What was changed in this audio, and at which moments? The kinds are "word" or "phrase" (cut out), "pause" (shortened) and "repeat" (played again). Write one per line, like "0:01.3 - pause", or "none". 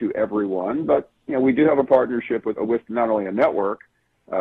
0:02.6 - phrase